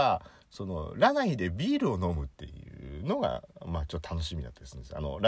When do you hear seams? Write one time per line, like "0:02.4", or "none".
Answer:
0:02.3